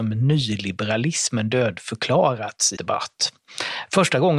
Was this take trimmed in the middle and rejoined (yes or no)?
yes